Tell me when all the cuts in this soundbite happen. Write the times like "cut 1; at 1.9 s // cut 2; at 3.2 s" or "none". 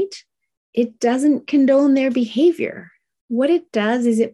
none